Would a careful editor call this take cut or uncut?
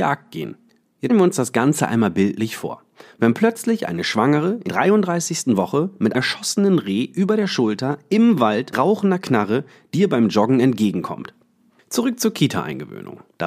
cut